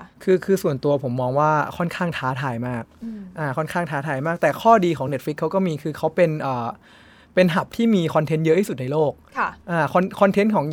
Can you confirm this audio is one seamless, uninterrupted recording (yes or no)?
yes